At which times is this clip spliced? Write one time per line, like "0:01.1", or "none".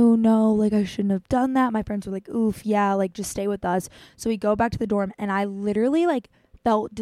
none